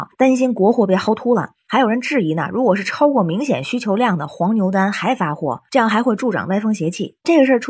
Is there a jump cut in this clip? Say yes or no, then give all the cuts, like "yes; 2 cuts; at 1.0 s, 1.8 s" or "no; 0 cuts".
no; 0 cuts